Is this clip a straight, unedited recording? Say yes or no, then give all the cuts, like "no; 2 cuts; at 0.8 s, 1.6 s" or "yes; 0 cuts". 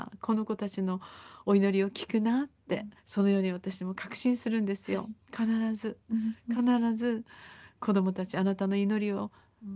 no; 1 cut; at 3.0 s